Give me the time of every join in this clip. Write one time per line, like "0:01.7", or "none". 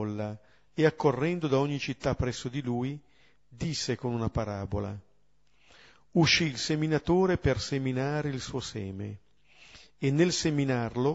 none